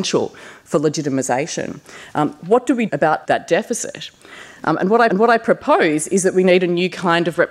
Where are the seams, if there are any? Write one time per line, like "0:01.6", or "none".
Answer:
0:02.9
0:03.2
0:05.1